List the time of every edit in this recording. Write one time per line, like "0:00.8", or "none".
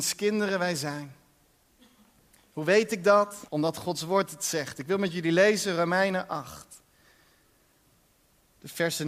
0:03.5